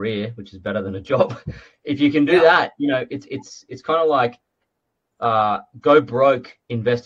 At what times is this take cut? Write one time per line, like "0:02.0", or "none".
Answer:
none